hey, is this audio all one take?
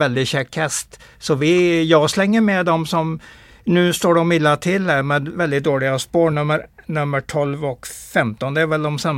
yes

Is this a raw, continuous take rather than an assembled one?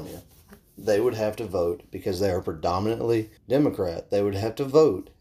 no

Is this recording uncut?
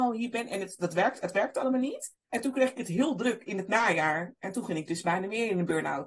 no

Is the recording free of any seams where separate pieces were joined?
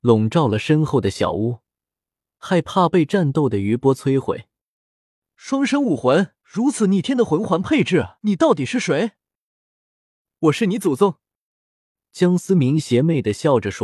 no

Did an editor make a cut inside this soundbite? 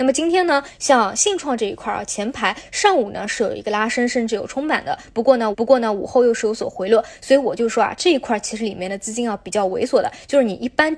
yes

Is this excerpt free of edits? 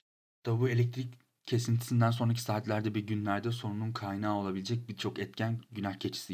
yes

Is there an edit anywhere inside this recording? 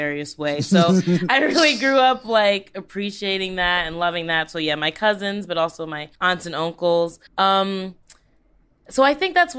yes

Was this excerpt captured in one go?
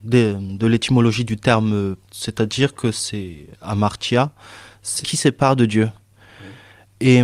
no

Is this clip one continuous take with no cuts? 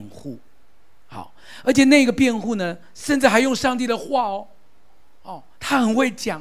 yes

